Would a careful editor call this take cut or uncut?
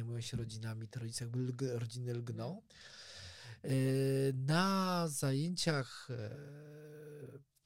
uncut